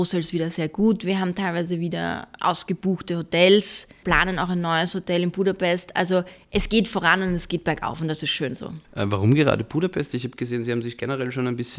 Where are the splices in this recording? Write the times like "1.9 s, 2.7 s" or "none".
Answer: 8.8 s